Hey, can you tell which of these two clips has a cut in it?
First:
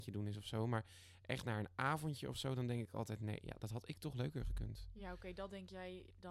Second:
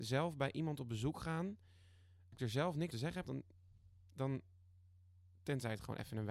second; 3 cuts; at 2.3 s, 2.9 s, 3.2 s

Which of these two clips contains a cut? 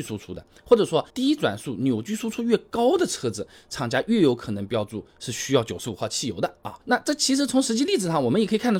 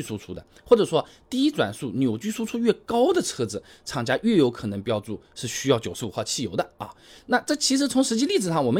first; 2 cuts; at 1.1 s, 6.8 s

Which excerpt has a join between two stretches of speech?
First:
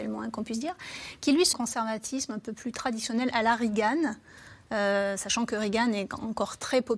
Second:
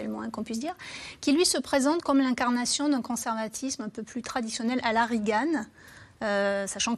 first; 1 cut; at 1.5 s

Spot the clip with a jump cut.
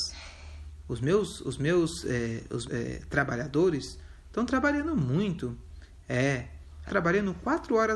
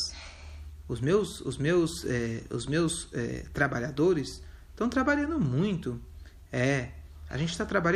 first; 2 cuts; at 2.7 s, 6.9 s

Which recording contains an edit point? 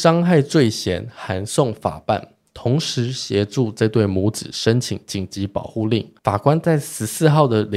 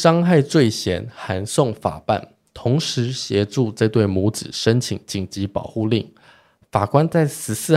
first; 1 cut; at 6.2 s

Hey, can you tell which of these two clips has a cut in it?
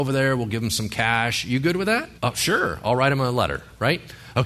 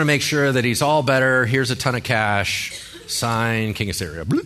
first; 1 cut; at 2.2 s

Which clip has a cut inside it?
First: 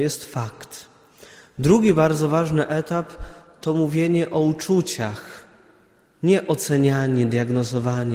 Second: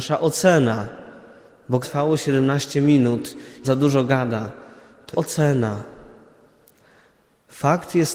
second; 3 cuts; at 1.8 s, 3.6 s, 5.1 s

